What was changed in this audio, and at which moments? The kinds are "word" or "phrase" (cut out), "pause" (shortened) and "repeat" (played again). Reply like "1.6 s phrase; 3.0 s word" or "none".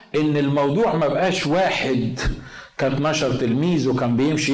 2.9 s word